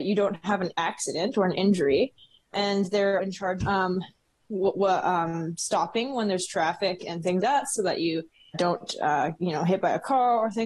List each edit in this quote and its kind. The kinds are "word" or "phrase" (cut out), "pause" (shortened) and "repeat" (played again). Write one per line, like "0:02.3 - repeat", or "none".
0:02.5 - word
0:03.2 - word
0:03.6 - word
0:07.4 - word
0:08.5 - word
0:09.4 - word